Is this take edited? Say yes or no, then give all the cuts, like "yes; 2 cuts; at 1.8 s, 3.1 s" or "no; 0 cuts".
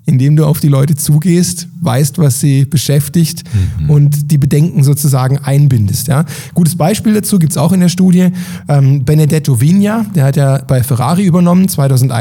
no; 0 cuts